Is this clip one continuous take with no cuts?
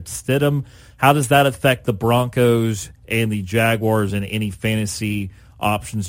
yes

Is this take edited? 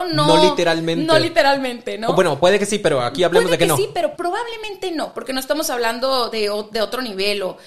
yes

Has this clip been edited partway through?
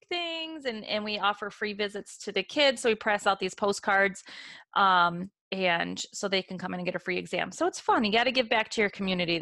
yes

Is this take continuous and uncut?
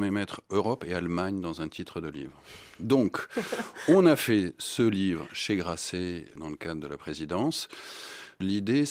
yes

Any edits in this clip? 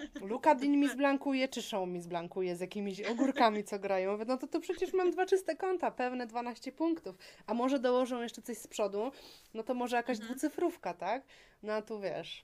no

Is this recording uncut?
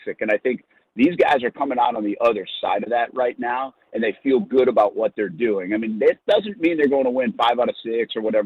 yes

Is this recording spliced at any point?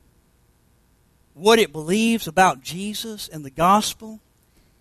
no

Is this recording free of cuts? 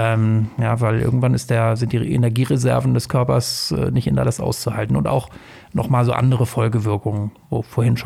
no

